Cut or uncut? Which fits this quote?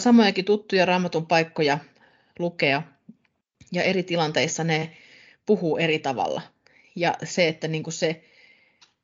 uncut